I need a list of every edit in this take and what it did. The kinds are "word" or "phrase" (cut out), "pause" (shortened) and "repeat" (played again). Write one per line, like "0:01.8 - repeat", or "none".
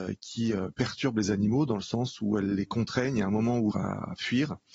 0:03.7 - word